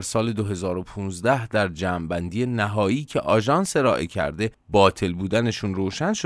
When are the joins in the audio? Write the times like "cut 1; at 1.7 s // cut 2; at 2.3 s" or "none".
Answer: none